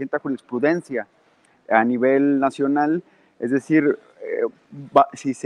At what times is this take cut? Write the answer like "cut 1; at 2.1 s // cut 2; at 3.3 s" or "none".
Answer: none